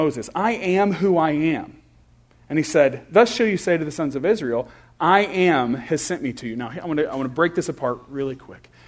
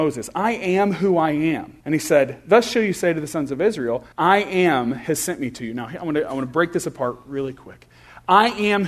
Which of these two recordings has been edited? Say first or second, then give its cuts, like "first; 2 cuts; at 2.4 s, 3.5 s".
second; 2 cuts; at 1.8 s, 4.1 s